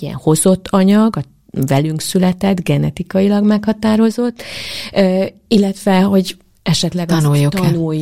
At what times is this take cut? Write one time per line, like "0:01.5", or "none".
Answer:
none